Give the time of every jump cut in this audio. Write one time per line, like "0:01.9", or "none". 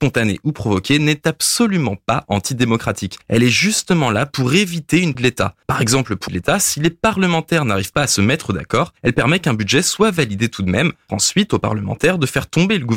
0:03.2
0:05.1
0:05.6
0:06.3
0:09.0
0:11.1